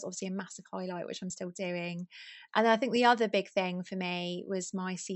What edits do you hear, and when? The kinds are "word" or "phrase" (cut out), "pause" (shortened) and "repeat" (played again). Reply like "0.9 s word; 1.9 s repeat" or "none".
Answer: none